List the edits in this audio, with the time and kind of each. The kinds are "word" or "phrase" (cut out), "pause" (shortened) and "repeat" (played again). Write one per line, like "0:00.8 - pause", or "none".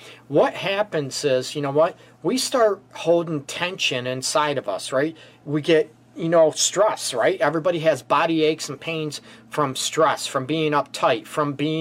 none